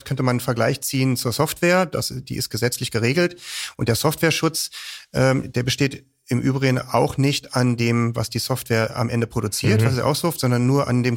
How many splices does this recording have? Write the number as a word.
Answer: zero